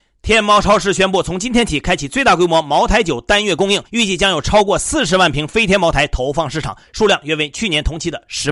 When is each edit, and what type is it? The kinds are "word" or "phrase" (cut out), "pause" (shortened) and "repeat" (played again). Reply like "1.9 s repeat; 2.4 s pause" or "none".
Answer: 3.9 s pause